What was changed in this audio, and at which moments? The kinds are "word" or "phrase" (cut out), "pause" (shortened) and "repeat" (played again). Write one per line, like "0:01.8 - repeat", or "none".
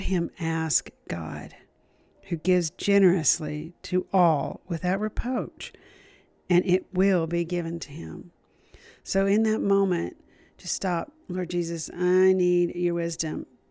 0:11.2 - pause